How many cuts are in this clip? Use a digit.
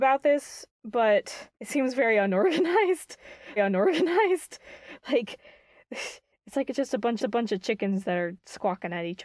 3